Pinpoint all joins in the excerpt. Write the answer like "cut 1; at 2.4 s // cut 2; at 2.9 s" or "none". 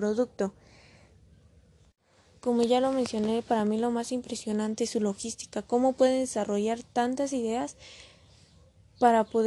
none